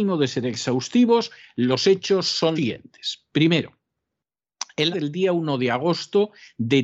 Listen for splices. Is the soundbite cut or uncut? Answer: cut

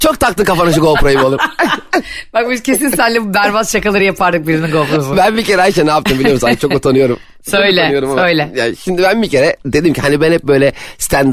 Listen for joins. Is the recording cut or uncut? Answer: uncut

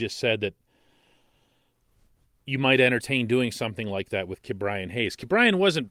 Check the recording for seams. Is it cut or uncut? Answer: uncut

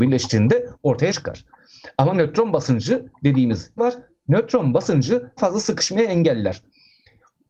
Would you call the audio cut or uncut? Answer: cut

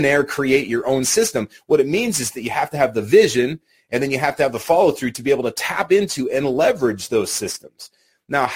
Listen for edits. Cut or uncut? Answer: uncut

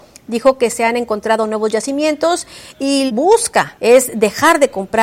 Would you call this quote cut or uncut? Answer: cut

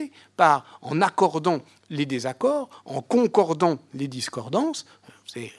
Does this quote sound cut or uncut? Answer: uncut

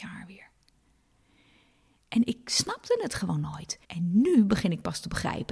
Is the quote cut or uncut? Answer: cut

